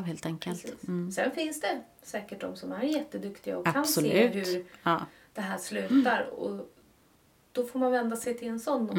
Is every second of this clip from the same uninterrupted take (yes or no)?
yes